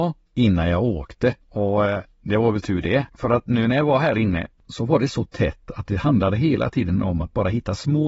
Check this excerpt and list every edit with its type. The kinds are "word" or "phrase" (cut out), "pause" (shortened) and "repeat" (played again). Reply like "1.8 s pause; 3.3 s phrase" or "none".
1.4 s pause; 3.1 s pause